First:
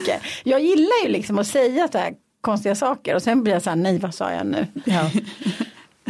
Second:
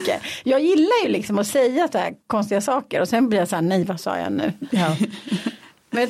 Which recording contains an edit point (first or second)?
second